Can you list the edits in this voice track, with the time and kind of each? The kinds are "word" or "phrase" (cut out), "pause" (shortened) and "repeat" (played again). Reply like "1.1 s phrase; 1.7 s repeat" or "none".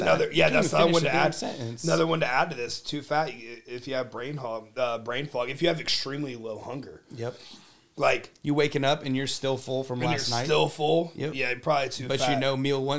none